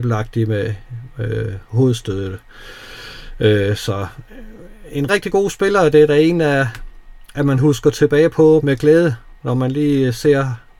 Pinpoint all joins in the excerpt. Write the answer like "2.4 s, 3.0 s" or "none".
5.1 s, 8.6 s, 9.4 s